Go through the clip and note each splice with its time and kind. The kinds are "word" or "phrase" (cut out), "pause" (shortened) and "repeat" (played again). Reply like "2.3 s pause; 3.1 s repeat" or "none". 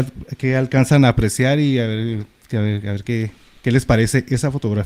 none